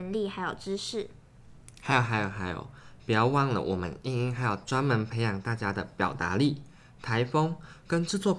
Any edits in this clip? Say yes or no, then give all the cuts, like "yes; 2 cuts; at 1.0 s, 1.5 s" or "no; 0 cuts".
no; 0 cuts